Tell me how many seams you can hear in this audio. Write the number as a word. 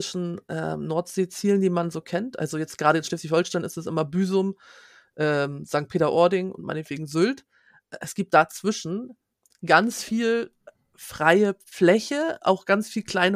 zero